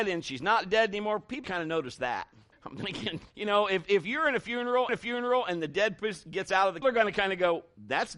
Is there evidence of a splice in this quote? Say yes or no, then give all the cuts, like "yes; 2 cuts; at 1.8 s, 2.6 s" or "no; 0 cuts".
yes; 5 cuts; at 1.4 s, 2.5 s, 3.3 s, 4.9 s, 6.8 s